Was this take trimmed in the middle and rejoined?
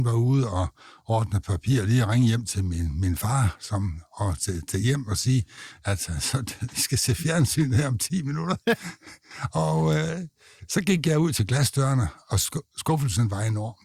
yes; 1 cut; at 8.6 s

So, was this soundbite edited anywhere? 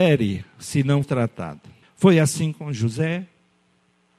yes; 2 cuts; at 1.0 s, 1.8 s

